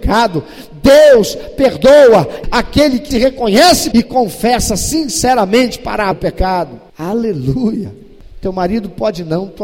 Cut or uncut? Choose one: cut